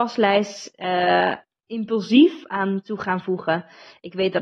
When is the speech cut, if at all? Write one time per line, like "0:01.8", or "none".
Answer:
none